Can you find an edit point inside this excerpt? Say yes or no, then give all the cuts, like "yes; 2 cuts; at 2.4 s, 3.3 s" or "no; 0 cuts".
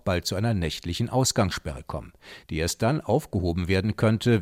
no; 0 cuts